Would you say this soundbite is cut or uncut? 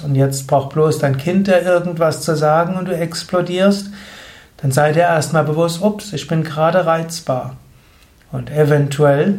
uncut